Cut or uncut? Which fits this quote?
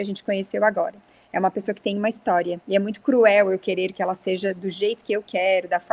uncut